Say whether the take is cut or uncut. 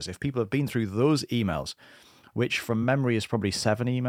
uncut